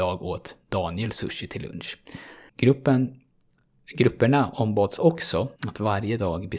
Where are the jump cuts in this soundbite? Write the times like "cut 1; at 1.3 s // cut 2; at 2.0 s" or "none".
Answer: cut 1; at 2.5 s // cut 2; at 5.6 s